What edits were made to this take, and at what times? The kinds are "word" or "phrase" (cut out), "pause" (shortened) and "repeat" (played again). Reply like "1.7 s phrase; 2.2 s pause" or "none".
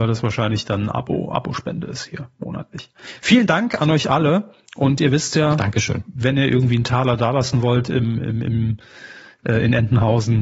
none